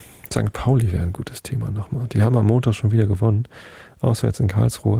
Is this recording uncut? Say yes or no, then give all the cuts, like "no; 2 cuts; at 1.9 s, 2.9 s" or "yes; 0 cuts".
yes; 0 cuts